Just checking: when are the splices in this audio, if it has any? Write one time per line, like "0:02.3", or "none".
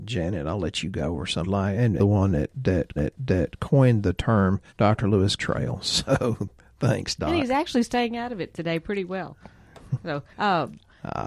0:01.4
0:02.0
0:03.0
0:04.7
0:05.4
0:10.3